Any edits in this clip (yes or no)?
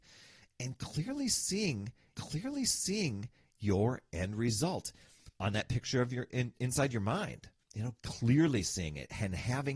yes